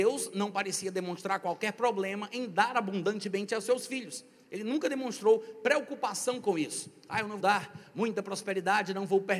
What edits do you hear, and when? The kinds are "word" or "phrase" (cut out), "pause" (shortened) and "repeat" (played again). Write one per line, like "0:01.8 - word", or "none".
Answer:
0:07.4 - word